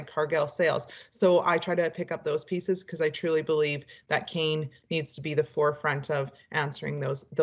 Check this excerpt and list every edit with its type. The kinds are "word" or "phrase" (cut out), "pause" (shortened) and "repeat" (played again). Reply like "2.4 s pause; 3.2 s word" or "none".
none

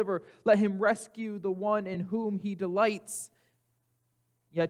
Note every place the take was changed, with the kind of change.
none

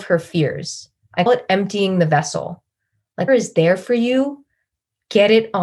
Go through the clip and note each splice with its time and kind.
1.3 s word; 3.3 s word

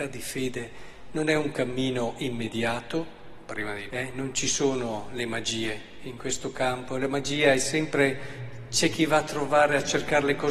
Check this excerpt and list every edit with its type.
3.9 s word

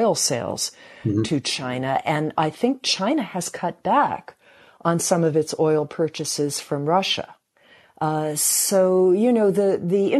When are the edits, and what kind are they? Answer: none

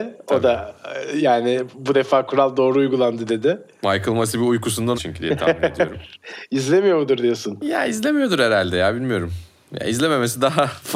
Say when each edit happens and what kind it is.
4.9 s phrase

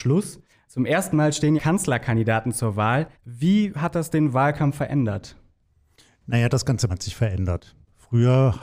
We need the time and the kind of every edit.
1.6 s phrase; 3.1 s pause; 6.9 s word

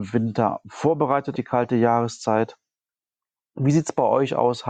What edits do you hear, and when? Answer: 1.3 s word

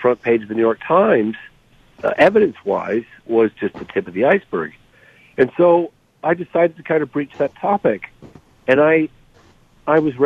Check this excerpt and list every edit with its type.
none

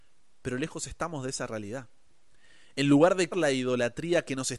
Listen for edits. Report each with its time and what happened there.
3.3 s word

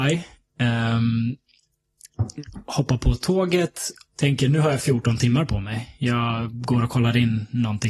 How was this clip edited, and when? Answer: 4.1 s word

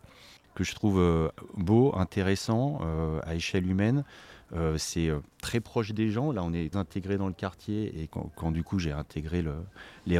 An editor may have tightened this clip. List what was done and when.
5.3 s pause; 6.7 s word; 8.1 s word

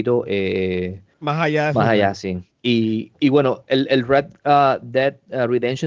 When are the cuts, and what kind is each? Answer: 1.1 s pause; 2.5 s pause

